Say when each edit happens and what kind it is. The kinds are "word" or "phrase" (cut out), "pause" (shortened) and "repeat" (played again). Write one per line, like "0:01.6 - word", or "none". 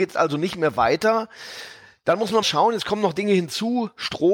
0:02.4 - word